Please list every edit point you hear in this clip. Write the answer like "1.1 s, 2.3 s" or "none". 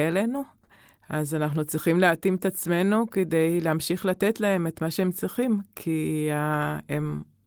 none